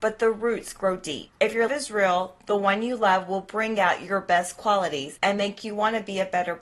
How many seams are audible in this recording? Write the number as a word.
two